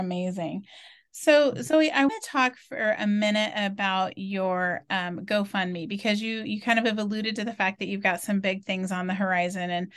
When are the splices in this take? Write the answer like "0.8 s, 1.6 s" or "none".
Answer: 2.1 s